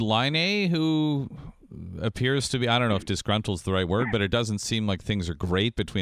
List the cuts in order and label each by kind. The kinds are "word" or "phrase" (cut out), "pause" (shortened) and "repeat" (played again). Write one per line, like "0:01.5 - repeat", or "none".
none